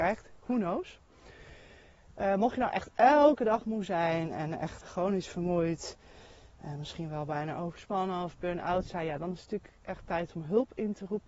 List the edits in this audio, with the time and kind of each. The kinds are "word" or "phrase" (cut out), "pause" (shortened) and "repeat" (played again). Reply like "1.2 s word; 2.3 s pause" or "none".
4.8 s word